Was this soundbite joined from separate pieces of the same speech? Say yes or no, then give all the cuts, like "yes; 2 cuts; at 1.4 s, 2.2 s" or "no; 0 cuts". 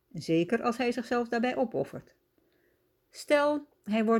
no; 0 cuts